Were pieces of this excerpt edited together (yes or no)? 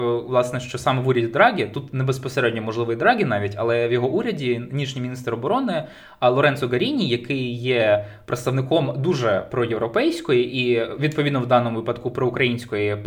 no